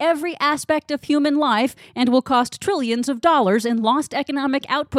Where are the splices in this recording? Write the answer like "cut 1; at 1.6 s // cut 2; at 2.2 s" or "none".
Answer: none

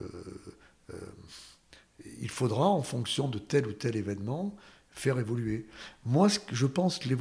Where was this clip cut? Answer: none

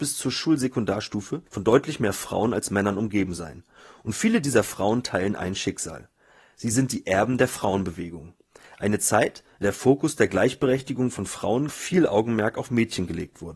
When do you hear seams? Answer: cut 1; at 1.5 s // cut 2; at 9.6 s // cut 3; at 11.7 s

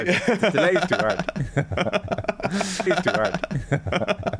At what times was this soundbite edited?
cut 1; at 2.9 s

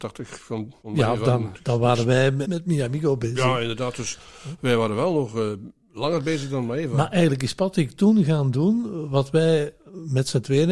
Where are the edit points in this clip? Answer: cut 1; at 2.4 s

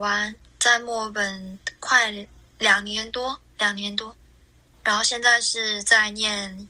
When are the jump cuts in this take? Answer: cut 1; at 2.5 s // cut 2; at 4.7 s

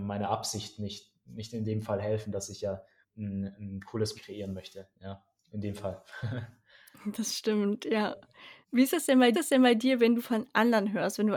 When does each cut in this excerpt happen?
cut 1; at 3.0 s // cut 2; at 4.1 s // cut 3; at 4.9 s // cut 4; at 8.6 s // cut 5; at 9.3 s // cut 6; at 10.2 s

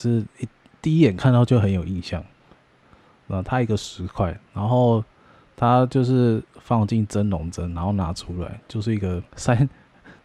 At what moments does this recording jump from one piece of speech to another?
cut 1; at 9.3 s

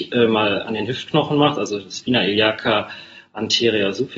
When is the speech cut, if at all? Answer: none

